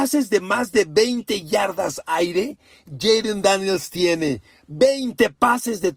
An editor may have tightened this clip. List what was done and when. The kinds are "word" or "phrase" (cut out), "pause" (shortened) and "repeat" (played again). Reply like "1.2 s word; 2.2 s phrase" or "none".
none